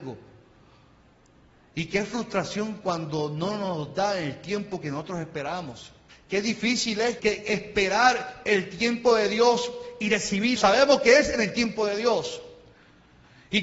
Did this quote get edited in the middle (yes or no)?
yes